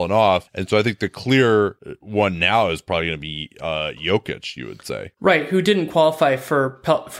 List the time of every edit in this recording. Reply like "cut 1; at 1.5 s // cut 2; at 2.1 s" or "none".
none